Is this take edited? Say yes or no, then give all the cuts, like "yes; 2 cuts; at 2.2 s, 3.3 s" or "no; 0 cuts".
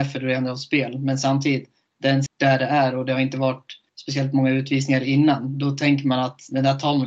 yes; 2 cuts; at 2.3 s, 3.9 s